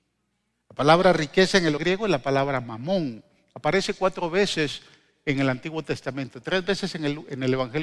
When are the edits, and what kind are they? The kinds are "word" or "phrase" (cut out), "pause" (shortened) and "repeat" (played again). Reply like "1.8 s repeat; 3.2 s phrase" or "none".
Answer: 1.8 s word